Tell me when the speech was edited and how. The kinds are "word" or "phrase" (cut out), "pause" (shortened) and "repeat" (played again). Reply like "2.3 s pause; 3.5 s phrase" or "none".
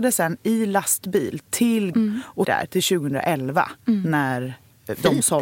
1.9 s word; 2.4 s word